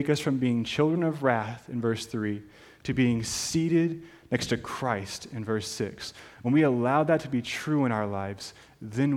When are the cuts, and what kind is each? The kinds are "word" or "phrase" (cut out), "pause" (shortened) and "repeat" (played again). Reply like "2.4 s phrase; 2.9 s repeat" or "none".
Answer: none